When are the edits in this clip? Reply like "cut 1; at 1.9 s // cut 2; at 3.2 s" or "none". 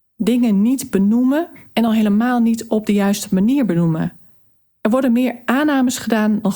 none